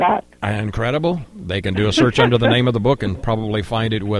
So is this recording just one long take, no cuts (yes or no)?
yes